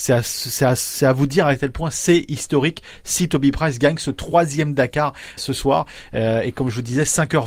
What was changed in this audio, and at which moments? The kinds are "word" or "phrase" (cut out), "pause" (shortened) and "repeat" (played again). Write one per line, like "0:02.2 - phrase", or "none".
0:05.4 - word